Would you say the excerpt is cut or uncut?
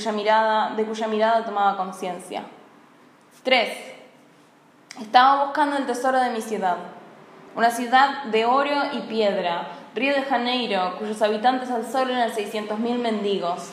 uncut